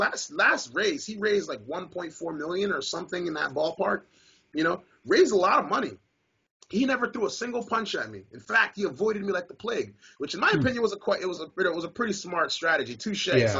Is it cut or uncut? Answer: uncut